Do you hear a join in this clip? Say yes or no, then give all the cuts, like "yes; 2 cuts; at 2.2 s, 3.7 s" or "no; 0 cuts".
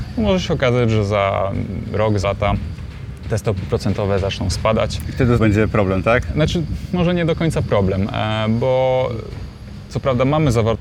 yes; 2 cuts; at 2.2 s, 5.4 s